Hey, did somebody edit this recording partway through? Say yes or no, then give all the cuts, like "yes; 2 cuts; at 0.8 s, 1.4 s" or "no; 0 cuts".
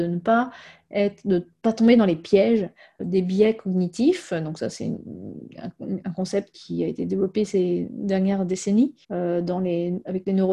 yes; 2 cuts; at 3.0 s, 9.0 s